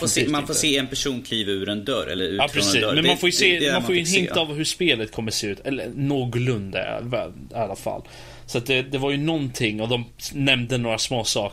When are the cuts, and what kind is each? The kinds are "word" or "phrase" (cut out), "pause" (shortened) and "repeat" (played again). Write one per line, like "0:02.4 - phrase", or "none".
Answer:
none